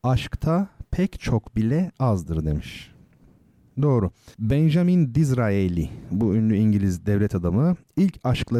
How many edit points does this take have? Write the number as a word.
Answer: one